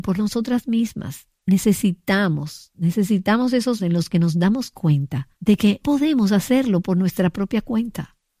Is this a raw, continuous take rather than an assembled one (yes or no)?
no